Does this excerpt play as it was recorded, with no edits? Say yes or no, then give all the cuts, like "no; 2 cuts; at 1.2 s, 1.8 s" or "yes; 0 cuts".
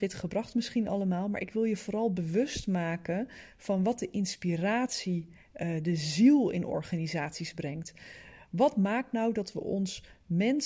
yes; 0 cuts